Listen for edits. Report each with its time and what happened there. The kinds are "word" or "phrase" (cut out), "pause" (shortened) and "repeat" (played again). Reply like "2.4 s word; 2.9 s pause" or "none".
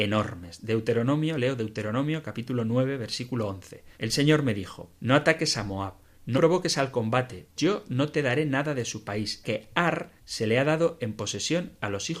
3.9 s pause; 4.9 s pause; 6.3 s word; 7.6 s word; 9.4 s word; 10.2 s pause